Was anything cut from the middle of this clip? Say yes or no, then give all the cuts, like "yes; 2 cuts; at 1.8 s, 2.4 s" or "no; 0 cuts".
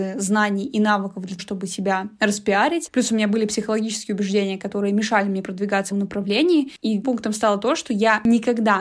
yes; 3 cuts; at 1.4 s, 5.9 s, 7.0 s